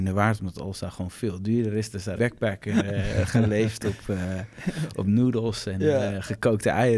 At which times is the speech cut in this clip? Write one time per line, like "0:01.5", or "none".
0:02.2

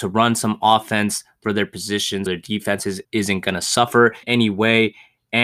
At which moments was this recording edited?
0:01.4
0:02.3
0:03.0
0:04.2

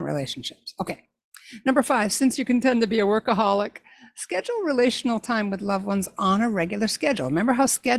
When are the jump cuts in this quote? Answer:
none

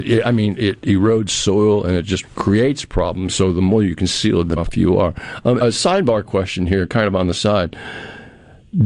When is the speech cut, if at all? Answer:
0:02.2
0:04.6
0:05.6

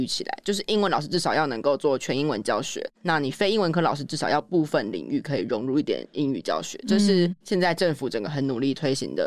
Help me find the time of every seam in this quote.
0:02.9
0:07.4

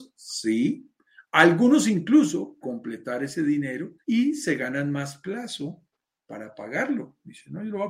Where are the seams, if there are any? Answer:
0:02.6
0:04.0

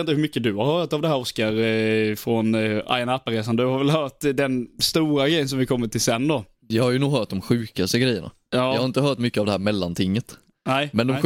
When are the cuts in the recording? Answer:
none

